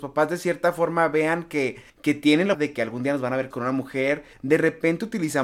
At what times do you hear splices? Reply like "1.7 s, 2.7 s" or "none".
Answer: 1.9 s, 2.5 s, 3.5 s, 4.3 s